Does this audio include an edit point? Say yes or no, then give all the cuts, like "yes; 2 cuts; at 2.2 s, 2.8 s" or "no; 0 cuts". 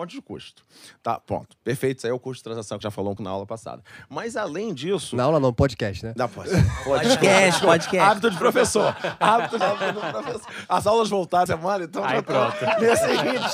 yes; 4 cuts; at 2.8 s, 3.2 s, 9.6 s, 11.5 s